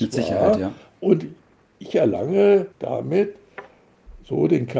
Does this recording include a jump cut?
yes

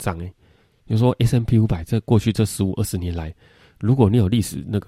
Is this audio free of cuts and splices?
yes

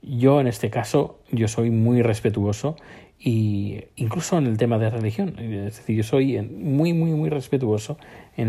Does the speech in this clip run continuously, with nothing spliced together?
yes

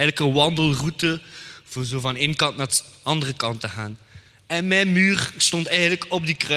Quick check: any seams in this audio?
no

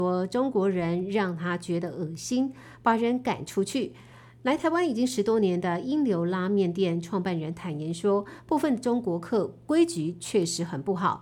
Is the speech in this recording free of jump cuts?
yes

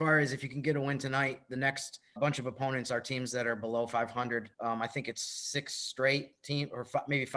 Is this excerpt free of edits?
no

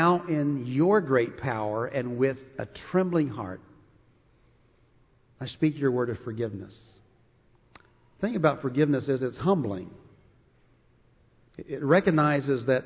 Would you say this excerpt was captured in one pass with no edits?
yes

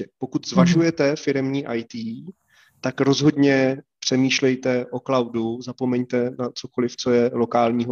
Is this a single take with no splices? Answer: yes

